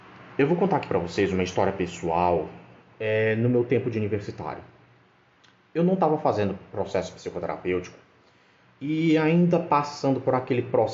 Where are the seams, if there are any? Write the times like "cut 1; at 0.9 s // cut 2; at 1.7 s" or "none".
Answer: none